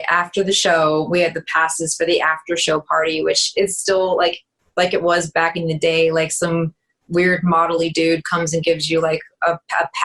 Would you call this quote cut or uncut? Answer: uncut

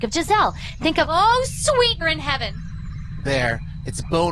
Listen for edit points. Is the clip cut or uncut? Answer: cut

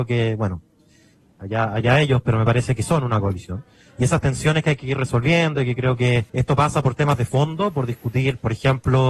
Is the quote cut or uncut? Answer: cut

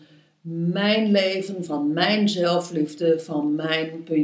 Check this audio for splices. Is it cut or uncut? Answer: uncut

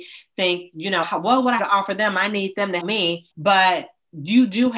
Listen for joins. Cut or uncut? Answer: cut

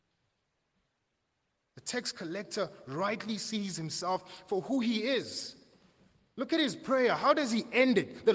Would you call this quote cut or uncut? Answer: uncut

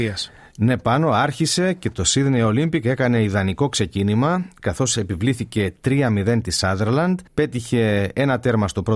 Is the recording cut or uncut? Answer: cut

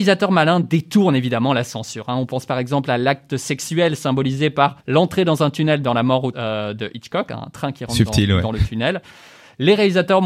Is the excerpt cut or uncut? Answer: cut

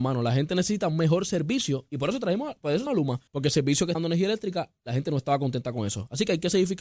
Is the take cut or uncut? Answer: cut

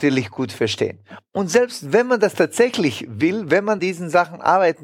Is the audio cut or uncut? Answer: cut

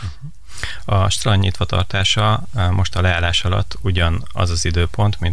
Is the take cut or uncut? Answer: uncut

